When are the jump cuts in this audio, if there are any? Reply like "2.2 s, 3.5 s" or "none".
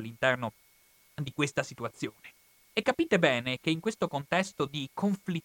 2.5 s